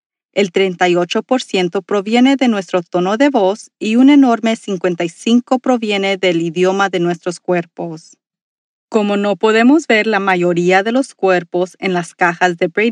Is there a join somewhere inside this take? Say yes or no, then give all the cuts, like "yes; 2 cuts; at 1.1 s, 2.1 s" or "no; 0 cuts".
no; 0 cuts